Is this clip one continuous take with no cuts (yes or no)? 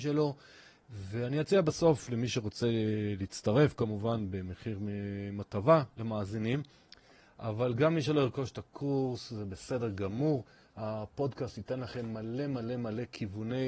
yes